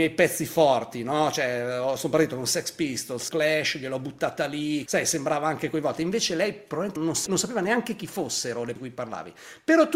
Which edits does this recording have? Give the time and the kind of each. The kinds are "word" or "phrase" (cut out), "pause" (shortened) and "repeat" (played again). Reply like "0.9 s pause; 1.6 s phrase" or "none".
3.3 s word; 4.9 s word; 7.0 s word; 7.3 s word; 8.8 s word